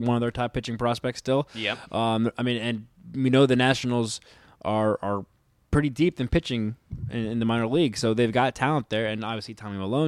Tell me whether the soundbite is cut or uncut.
uncut